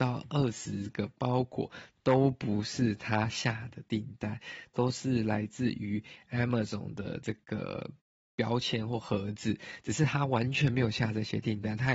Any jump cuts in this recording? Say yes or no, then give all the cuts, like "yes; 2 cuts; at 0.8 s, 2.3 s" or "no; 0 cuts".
no; 0 cuts